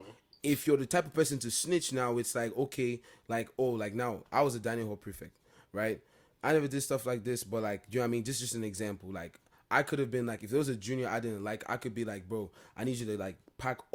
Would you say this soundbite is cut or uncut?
uncut